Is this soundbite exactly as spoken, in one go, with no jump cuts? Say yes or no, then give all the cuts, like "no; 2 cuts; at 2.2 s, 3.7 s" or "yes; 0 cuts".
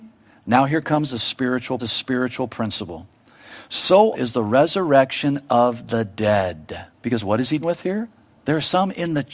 no; 5 cuts; at 1.8 s, 4.1 s, 6.9 s, 7.6 s, 8.3 s